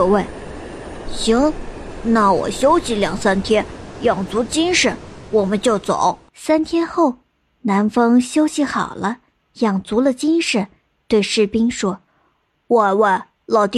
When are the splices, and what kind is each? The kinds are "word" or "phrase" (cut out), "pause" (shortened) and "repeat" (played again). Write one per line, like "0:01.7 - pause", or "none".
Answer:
0:06.3 - pause
0:12.1 - pause